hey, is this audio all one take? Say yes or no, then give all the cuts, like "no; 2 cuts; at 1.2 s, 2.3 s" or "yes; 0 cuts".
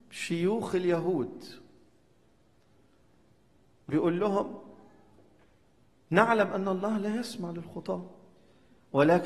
yes; 0 cuts